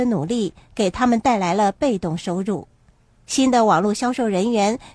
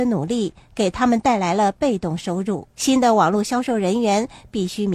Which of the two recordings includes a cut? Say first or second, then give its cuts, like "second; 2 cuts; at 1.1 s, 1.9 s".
second; 1 cut; at 2.7 s